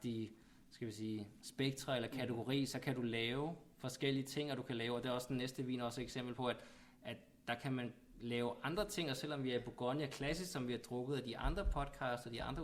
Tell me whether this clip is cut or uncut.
uncut